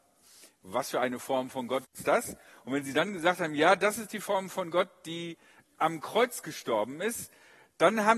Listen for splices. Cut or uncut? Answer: uncut